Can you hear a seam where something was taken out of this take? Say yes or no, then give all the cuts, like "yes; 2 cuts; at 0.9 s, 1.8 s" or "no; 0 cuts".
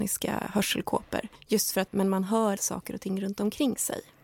yes; 3 cuts; at 1.3 s, 1.9 s, 2.6 s